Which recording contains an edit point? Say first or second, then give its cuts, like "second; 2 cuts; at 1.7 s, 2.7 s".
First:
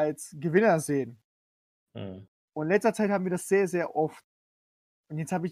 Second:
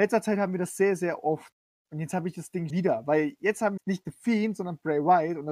second; 3 cuts; at 1.7 s, 2.7 s, 3.8 s